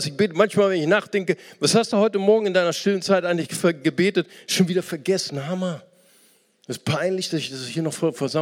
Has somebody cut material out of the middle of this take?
no; 0 cuts

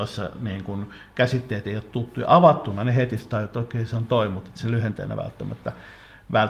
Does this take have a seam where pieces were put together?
no; 0 cuts

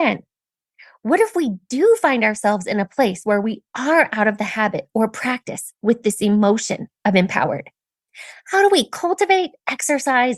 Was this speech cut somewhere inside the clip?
no; 0 cuts

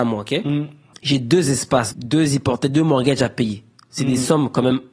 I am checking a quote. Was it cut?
yes; 2 cuts; at 0.9 s, 1.9 s

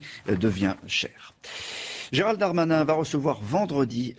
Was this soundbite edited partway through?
no; 0 cuts

